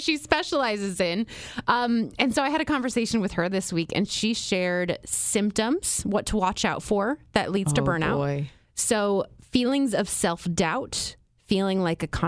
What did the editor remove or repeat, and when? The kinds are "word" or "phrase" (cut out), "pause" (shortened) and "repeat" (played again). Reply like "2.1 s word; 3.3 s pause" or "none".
none